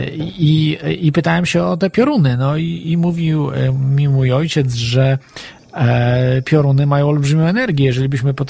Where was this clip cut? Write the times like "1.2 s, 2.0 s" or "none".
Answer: none